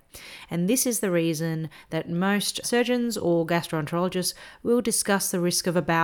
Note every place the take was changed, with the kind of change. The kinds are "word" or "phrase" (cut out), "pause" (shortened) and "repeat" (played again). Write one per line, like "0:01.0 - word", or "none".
0:02.6 - word